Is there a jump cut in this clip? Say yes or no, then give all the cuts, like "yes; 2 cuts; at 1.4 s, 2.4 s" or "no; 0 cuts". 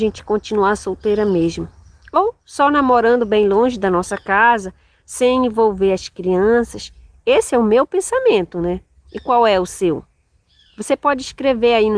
no; 0 cuts